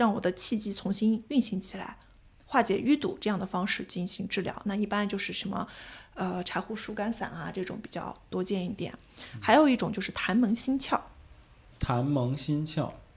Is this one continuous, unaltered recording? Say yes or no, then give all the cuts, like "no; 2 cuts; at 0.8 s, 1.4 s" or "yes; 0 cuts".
yes; 0 cuts